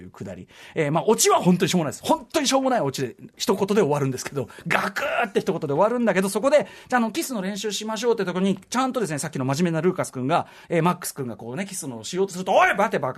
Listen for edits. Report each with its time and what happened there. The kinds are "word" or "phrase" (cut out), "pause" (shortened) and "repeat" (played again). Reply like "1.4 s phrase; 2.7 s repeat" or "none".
10.6 s word

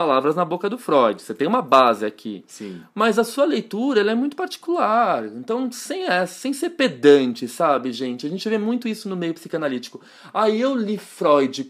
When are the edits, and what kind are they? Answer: none

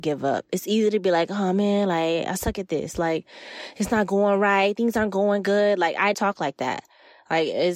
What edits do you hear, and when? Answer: 6.1 s word

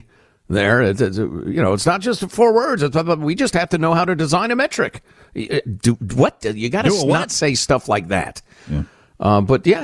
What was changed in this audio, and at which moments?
none

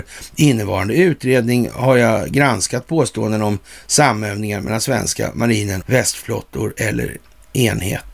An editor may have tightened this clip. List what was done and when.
5.8 s word

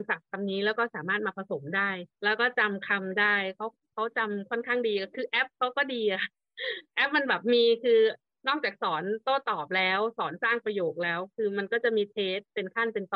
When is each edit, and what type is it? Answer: 2.1 s pause

